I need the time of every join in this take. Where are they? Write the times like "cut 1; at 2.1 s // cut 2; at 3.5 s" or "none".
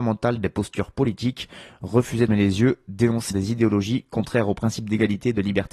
cut 1; at 2.3 s // cut 2; at 3.3 s